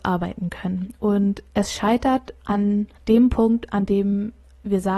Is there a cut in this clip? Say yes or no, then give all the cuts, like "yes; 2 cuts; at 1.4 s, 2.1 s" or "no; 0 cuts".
yes; 1 cut; at 3.0 s